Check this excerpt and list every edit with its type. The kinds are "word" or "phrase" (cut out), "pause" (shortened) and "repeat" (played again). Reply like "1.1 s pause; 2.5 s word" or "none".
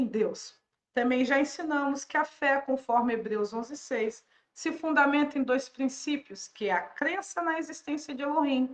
none